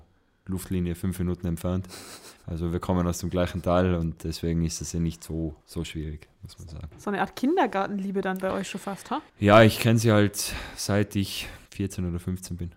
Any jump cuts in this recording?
yes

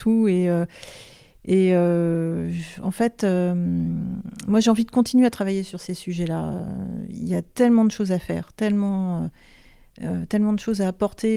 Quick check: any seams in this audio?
no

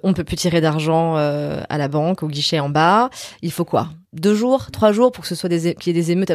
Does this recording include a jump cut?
yes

